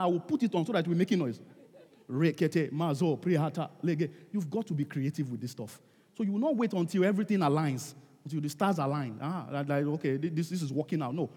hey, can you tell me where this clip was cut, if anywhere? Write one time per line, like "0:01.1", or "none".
none